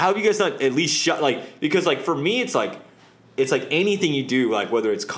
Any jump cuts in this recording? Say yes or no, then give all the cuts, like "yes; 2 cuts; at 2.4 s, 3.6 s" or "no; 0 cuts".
no; 0 cuts